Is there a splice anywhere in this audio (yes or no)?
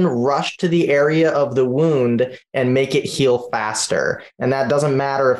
no